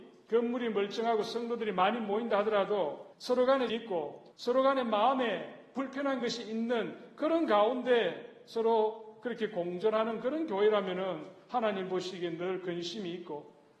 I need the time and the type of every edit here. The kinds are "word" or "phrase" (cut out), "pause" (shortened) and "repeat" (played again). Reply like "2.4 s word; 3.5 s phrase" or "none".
3.1 s pause; 3.7 s phrase; 4.3 s pause